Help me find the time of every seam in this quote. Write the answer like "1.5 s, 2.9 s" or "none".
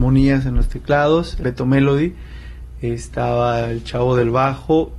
1.4 s